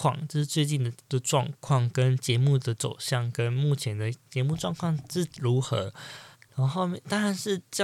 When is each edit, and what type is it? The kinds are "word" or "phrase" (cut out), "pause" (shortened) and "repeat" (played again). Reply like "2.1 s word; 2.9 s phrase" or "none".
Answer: 1.0 s pause; 4.2 s pause; 6.3 s pause